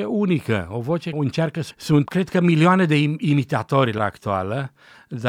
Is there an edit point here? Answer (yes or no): yes